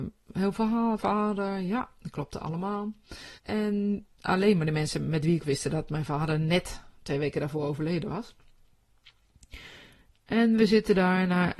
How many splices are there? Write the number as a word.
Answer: three